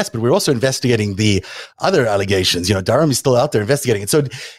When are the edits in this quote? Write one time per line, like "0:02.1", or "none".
none